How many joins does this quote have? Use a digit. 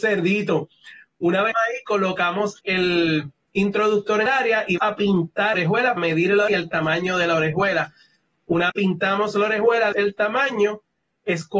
9